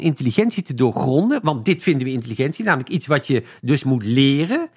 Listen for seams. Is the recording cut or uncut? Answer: uncut